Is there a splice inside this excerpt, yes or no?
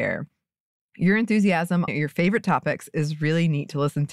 yes